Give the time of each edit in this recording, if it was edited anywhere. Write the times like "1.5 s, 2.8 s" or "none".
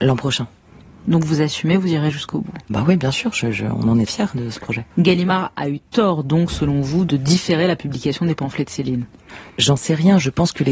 2.7 s, 4.1 s, 4.9 s